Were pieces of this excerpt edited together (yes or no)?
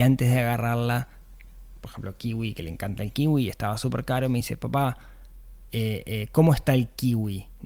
no